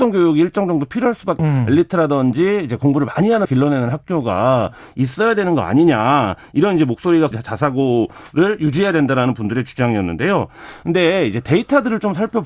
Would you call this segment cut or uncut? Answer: cut